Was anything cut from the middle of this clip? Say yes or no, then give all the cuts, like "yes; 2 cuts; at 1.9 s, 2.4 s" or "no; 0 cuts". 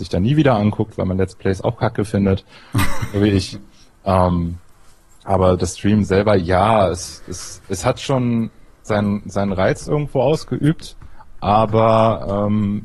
no; 0 cuts